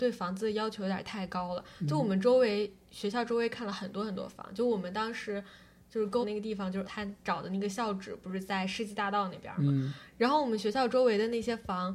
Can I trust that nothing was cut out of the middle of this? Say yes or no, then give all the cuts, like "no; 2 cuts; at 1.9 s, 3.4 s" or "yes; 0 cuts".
no; 2 cuts; at 6.2 s, 6.8 s